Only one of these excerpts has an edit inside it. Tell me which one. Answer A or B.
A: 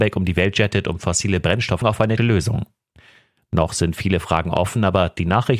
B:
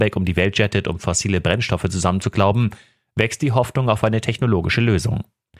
A